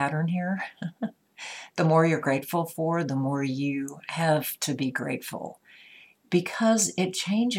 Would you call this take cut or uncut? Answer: uncut